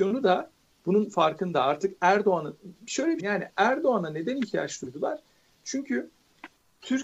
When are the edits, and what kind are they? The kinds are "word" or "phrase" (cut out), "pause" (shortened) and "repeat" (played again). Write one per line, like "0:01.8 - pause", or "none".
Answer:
0:03.2 - phrase